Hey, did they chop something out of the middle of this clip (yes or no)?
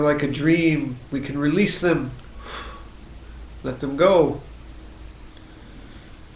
no